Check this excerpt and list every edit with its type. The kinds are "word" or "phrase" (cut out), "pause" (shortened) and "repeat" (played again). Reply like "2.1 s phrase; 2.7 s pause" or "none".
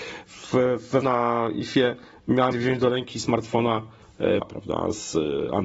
1.0 s word; 2.5 s word; 4.4 s word